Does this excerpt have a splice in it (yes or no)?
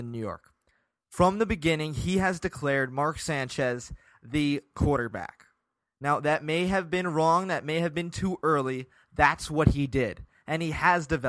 no